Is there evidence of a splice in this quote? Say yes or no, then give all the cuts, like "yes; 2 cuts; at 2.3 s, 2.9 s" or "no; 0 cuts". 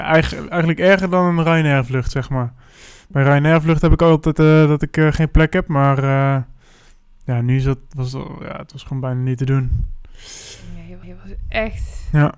yes; 1 cut; at 11.0 s